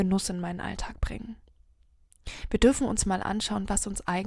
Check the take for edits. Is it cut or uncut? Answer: uncut